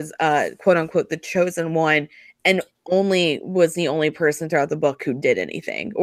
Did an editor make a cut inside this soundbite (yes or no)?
no